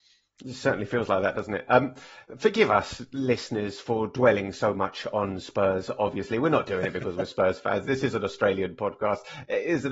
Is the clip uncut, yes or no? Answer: yes